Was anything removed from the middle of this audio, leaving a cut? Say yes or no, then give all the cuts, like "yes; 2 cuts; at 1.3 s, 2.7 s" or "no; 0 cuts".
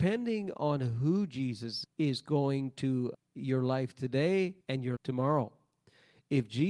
yes; 4 cuts; at 1.8 s, 3.1 s, 4.6 s, 5.0 s